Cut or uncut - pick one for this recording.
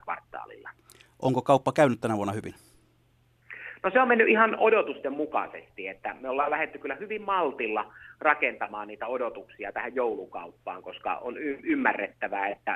uncut